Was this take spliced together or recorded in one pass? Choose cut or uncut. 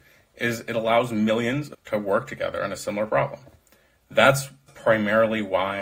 cut